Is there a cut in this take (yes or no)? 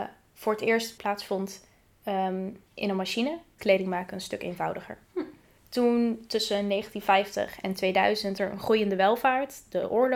yes